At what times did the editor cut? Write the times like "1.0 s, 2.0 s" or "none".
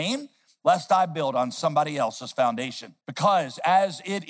3.0 s